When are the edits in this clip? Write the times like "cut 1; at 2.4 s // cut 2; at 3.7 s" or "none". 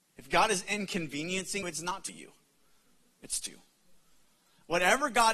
cut 1; at 1.6 s // cut 2; at 2.1 s // cut 3; at 3.5 s